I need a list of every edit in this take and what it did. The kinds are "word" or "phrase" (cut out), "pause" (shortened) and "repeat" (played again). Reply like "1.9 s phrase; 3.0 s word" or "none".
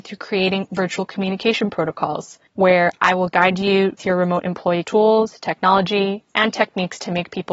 4.0 s word; 4.8 s word